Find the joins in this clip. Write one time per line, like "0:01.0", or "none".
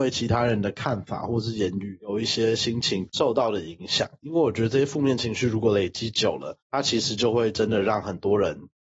0:06.6